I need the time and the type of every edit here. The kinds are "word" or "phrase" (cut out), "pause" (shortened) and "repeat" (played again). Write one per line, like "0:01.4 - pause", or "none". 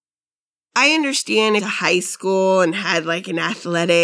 0:01.6 - phrase